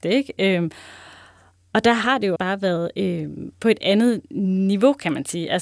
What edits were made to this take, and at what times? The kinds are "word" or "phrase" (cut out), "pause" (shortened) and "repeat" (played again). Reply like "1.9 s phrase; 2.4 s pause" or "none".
2.4 s word